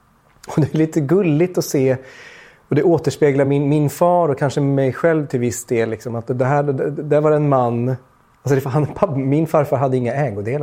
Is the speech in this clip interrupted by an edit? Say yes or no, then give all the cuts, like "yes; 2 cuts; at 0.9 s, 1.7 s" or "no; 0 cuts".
no; 0 cuts